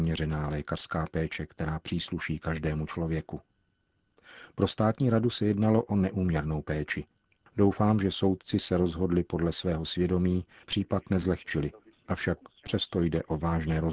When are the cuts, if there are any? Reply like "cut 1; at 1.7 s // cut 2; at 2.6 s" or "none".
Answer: cut 1; at 10.6 s